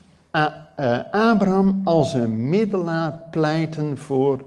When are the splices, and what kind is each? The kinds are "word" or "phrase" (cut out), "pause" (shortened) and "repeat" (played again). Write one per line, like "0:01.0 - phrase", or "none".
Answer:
none